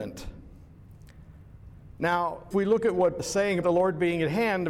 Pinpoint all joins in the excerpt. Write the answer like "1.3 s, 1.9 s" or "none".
2.5 s, 3.2 s, 3.6 s